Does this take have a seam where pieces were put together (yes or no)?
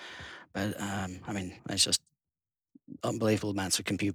yes